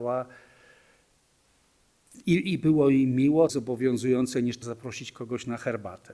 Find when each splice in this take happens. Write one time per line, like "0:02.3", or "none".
0:03.5
0:04.6